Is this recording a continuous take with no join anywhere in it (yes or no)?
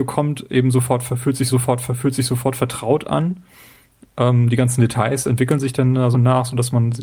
no